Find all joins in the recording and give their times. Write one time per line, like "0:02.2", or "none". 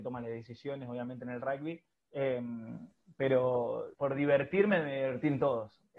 0:01.9
0:03.9